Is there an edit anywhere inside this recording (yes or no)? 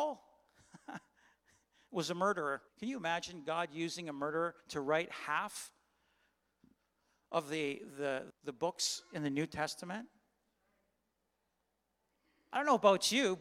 yes